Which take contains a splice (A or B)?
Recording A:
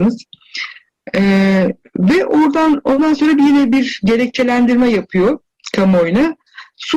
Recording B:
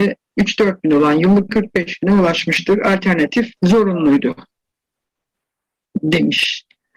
B